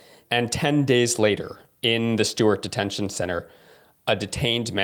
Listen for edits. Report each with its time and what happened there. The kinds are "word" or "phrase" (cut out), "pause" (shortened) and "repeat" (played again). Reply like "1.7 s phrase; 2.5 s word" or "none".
none